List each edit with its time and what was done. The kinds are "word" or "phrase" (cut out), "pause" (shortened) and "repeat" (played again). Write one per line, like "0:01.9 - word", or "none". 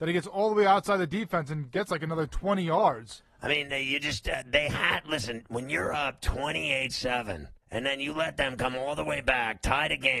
0:07.6 - pause